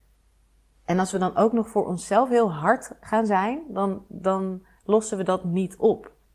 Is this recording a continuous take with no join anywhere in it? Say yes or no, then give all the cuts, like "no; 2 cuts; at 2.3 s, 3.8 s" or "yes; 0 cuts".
yes; 0 cuts